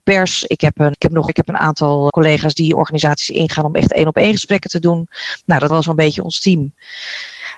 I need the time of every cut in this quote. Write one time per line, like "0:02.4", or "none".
0:00.9
0:01.3
0:02.1
0:05.7